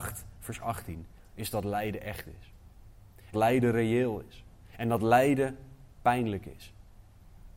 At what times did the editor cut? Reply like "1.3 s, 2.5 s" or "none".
3.3 s